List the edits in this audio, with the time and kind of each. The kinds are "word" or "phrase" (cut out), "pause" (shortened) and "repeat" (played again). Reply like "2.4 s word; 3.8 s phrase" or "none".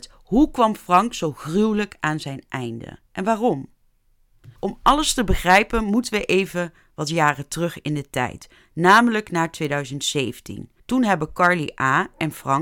3.1 s pause; 4.6 s pause; 10.8 s pause

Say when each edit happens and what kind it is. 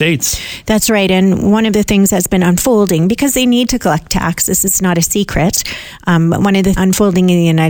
6.8 s phrase

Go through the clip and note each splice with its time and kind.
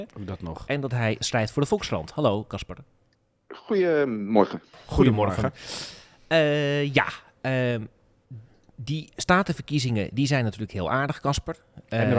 none

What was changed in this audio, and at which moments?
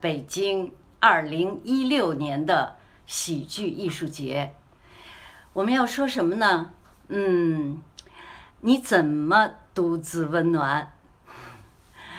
8.5 s pause

